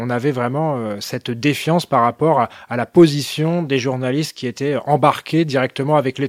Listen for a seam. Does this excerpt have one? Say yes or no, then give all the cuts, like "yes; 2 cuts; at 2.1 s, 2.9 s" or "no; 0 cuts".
no; 0 cuts